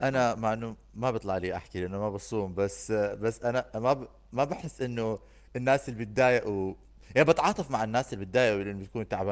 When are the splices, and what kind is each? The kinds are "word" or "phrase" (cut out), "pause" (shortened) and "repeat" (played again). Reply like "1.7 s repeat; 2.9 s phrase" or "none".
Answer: none

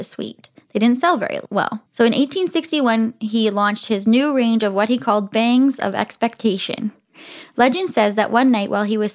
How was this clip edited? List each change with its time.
1.9 s pause

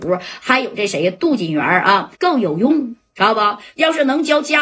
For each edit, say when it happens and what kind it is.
2.1 s pause

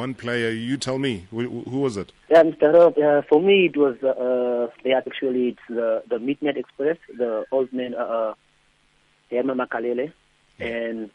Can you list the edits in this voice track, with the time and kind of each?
2.2 s pause; 5.1 s word

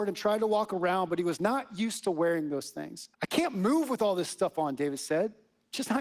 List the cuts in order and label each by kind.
3.1 s pause

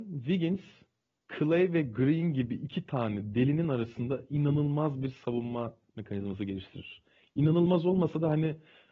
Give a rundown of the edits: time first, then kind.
none

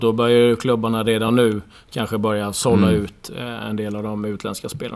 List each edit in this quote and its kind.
none

